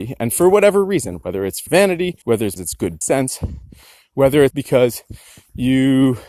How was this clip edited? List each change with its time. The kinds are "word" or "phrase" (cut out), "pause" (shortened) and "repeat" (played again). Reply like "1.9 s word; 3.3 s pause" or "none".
1.7 s word; 2.2 s pause; 2.6 s word; 3.0 s word; 4.5 s word